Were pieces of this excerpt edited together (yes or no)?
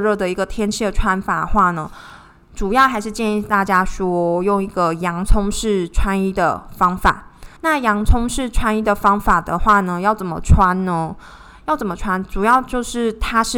yes